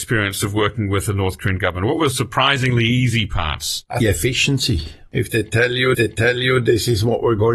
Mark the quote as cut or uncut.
cut